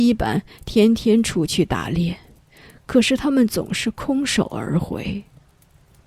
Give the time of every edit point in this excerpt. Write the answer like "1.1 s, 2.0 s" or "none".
none